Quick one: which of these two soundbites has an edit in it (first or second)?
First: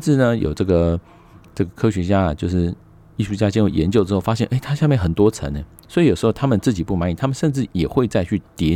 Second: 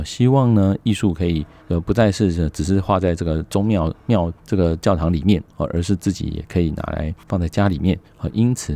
second